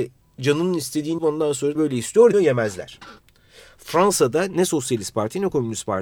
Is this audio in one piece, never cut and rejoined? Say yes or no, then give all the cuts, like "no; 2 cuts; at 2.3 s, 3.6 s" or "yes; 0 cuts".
no; 3 cuts; at 1.2 s, 1.8 s, 2.3 s